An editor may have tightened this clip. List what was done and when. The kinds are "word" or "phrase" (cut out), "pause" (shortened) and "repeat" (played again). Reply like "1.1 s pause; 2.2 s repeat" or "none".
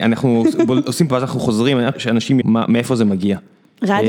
1.1 s word; 1.9 s word; 2.4 s word

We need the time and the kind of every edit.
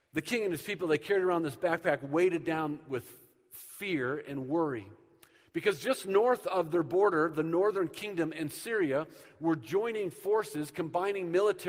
none

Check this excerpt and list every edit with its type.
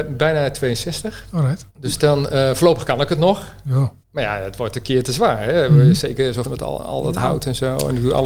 1.7 s pause; 4.0 s pause; 6.4 s phrase

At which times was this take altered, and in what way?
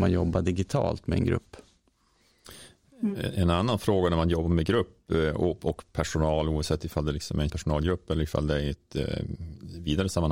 7.5 s word

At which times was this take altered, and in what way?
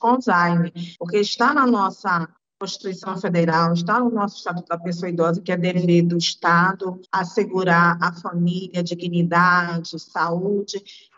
0.9 s pause; 2.4 s pause; 7.0 s pause

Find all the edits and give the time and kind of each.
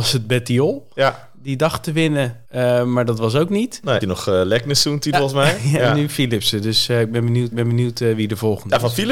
2.4 s pause; 4.0 s phrase; 5.1 s phrase; 7.5 s repeat

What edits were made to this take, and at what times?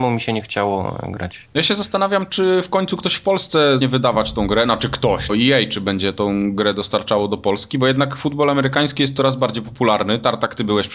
3.8 s word; 5.3 s word

